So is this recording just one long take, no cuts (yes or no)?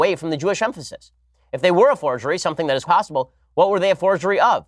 no